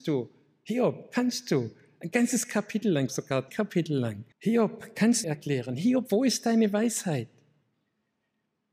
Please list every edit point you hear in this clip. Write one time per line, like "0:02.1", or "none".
0:03.1
0:03.5
0:04.3
0:05.2

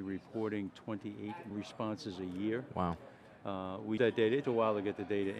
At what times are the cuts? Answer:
0:01.5
0:04.0
0:04.4

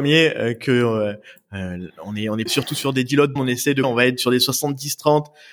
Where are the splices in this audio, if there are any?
0:02.5
0:03.4
0:03.8

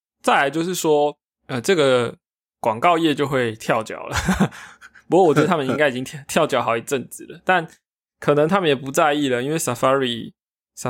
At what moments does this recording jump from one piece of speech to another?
none

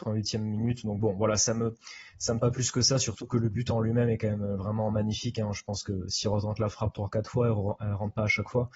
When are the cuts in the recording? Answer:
0:02.4

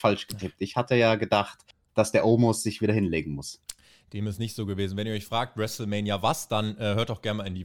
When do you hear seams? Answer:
none

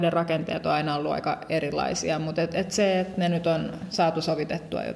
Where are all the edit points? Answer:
none

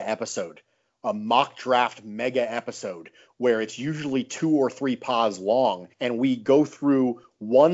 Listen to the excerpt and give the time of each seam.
0:05.9

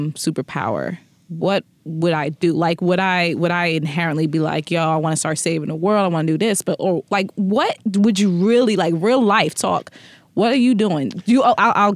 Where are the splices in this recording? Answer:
none

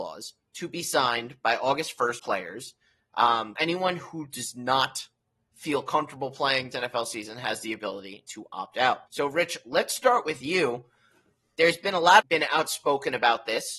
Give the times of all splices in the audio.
0:02.2
0:03.6
0:05.4
0:06.7
0:09.1
0:12.2

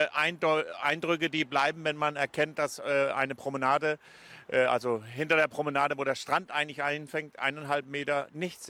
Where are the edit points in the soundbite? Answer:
none

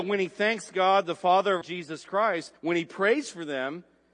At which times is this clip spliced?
0:01.6
0:02.6

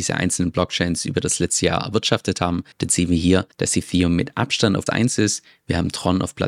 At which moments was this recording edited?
0:02.7
0:03.5
0:04.9

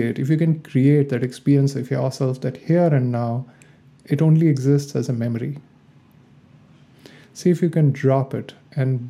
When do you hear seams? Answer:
none

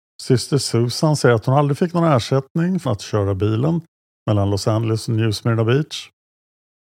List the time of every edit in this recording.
0:02.9

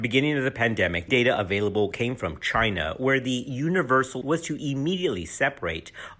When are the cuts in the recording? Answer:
0:01.1
0:04.2

